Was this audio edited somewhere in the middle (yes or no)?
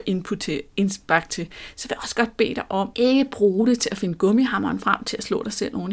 yes